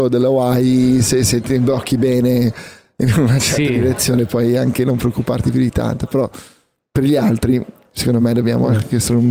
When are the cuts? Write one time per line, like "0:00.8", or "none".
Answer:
none

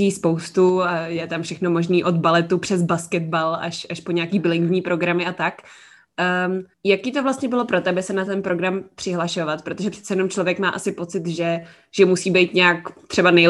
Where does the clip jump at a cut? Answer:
0:06.7

